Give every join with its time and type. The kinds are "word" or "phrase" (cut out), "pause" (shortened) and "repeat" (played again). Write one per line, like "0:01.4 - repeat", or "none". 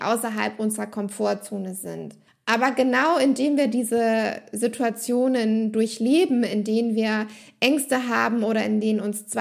0:02.3 - pause